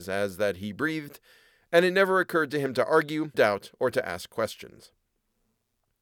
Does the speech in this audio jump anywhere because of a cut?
yes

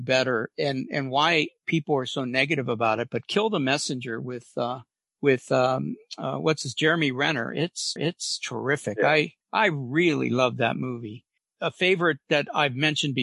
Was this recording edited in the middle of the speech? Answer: yes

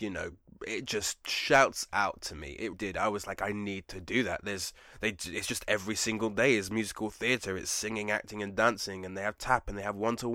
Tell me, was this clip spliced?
yes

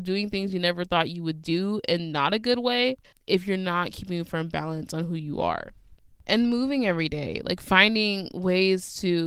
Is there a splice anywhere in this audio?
no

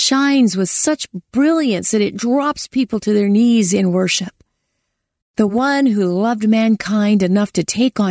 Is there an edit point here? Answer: no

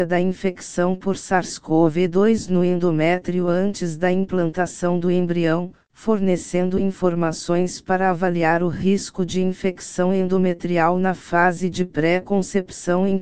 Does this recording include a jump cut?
no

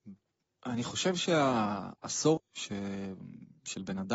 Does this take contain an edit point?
yes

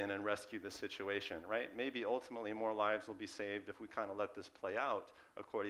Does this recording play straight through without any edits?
yes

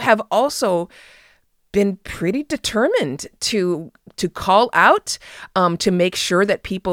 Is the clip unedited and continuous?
yes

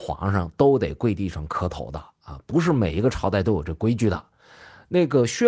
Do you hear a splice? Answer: no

